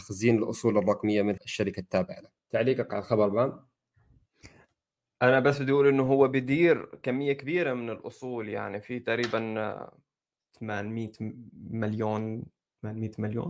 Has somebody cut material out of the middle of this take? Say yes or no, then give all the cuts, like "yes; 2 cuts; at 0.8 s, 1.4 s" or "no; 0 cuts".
yes; 2 cuts; at 1.4 s, 2.4 s